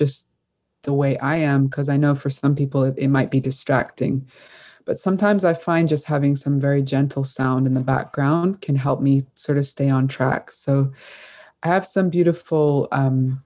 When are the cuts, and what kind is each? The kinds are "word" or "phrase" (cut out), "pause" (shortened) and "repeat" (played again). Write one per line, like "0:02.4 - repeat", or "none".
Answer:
none